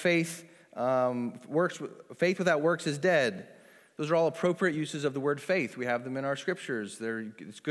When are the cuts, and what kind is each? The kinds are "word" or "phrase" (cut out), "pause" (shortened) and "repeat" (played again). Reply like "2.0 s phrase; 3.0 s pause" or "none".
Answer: none